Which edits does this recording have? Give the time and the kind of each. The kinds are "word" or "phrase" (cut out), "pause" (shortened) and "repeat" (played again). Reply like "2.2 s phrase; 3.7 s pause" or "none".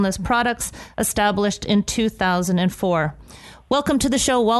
none